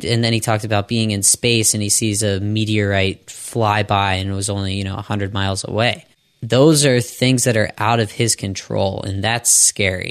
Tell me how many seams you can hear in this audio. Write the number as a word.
zero